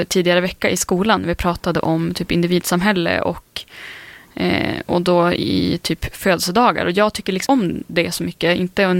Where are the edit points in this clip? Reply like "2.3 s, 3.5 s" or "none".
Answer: 7.5 s